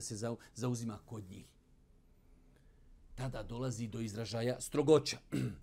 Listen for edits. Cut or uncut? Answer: uncut